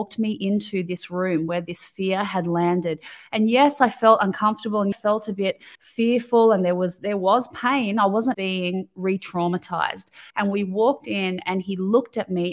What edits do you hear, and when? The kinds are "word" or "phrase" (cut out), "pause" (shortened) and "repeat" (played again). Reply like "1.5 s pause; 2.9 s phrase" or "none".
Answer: 4.9 s phrase; 5.7 s pause; 8.3 s phrase; 10.3 s pause